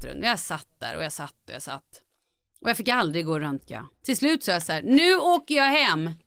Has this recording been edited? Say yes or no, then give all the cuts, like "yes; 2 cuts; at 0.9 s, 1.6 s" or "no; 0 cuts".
yes; 1 cut; at 3.9 s